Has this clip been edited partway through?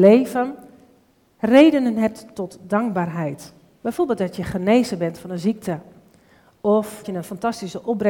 yes; 1 cut; at 7.0 s

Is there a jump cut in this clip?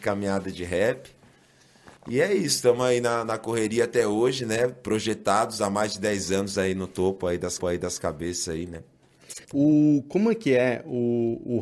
yes; 3 cuts; at 2.0 s, 7.6 s, 9.4 s

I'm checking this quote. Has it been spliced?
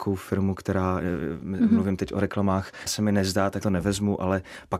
yes; 2 cuts; at 2.9 s, 3.6 s

